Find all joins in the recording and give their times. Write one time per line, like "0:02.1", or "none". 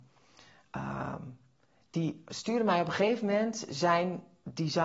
none